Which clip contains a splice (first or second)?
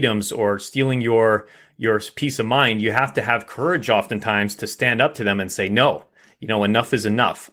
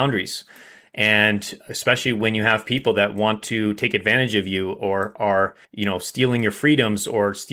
second